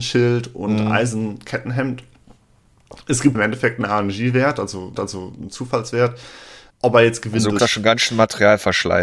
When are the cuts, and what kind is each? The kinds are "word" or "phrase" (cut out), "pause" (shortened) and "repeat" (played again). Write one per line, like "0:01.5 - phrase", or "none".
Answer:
0:03.3 - word
0:05.0 - repeat
0:06.7 - pause
0:07.6 - word